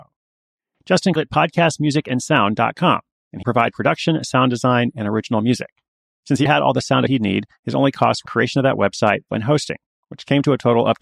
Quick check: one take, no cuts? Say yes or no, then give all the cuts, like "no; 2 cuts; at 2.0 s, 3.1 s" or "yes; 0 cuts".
no; 6 cuts; at 1.2 s, 3.4 s, 6.5 s, 7.1 s, 8.3 s, 9.3 s